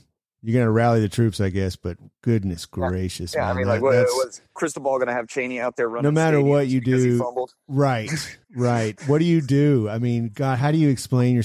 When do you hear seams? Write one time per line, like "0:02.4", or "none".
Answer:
0:04.5
0:08.4